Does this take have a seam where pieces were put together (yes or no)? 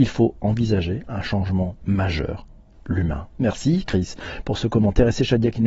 no